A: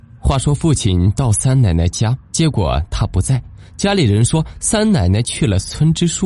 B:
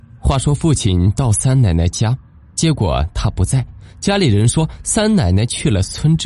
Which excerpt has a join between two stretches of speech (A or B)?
A